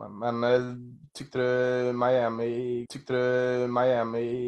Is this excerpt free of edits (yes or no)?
no